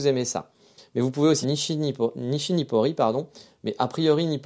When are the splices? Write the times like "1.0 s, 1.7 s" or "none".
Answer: 1.4 s